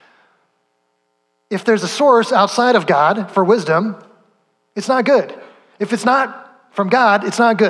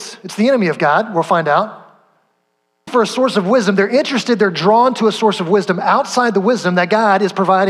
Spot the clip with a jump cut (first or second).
second